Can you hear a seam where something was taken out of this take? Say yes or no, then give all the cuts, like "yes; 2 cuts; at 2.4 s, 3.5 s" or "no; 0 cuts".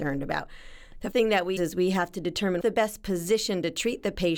yes; 3 cuts; at 1.1 s, 1.6 s, 2.6 s